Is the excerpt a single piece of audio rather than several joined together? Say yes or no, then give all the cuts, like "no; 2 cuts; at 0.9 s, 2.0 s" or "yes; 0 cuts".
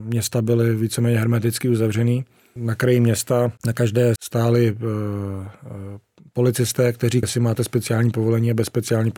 no; 4 cuts; at 2.6 s, 3.6 s, 4.2 s, 7.2 s